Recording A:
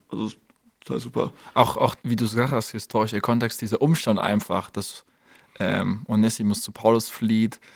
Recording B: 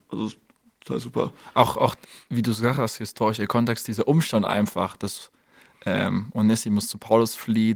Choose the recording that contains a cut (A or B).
A